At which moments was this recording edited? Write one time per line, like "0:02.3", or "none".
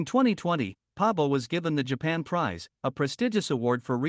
none